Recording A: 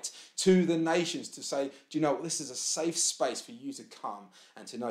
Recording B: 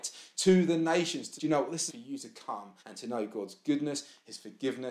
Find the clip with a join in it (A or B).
B